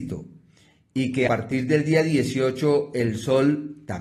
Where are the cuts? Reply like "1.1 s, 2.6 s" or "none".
1.3 s